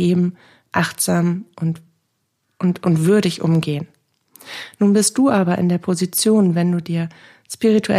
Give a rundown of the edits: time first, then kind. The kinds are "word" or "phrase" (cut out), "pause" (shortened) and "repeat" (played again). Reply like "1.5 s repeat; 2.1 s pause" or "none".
none